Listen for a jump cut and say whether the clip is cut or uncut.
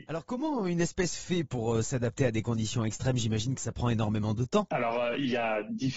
uncut